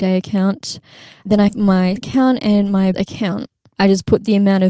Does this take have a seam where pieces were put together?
yes; 3 cuts; at 1.5 s, 2.0 s, 2.9 s

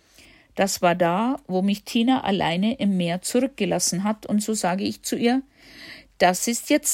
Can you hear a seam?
no; 0 cuts

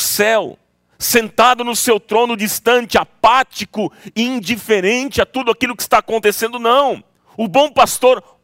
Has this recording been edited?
yes; 1 cut; at 7.2 s

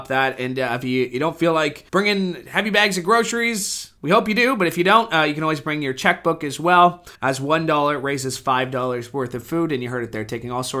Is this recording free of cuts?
no; 3 cuts; at 1.9 s, 4.0 s, 7.1 s

